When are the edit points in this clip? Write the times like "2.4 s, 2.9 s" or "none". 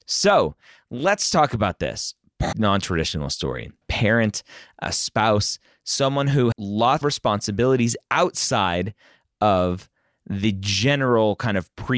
2.5 s, 3.8 s, 6.5 s, 7.0 s

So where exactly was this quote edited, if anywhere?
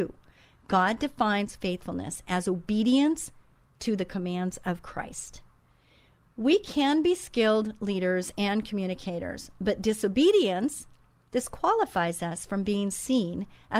none

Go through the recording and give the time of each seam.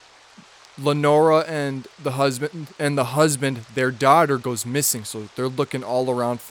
1.9 s, 2.8 s

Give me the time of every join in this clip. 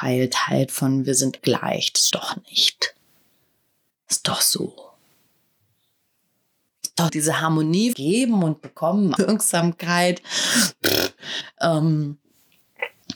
1.4 s, 2.1 s, 7.1 s, 7.9 s, 9.2 s

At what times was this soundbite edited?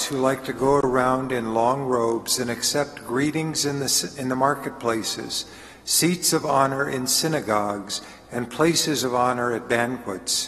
none

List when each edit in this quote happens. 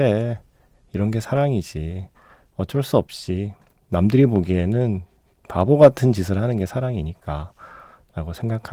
none

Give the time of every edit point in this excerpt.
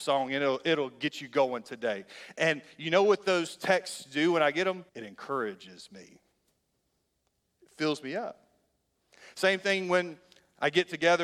4.9 s

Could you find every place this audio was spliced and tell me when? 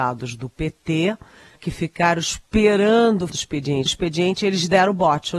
1.6 s, 3.3 s, 3.9 s

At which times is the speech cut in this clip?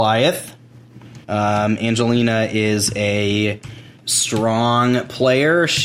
1.2 s, 4.0 s

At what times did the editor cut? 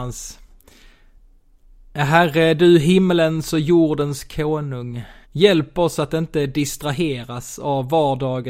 5.2 s

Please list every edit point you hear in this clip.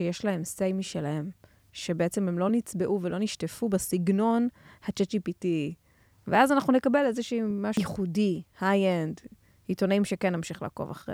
none

